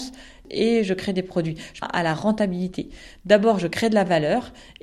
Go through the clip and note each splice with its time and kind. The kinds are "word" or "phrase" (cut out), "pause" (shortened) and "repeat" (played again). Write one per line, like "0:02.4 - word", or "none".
0:01.8 - phrase